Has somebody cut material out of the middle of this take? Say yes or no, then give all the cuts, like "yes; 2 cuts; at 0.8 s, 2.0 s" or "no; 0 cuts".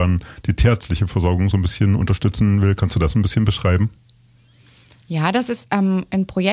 no; 0 cuts